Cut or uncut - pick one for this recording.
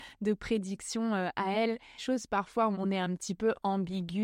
cut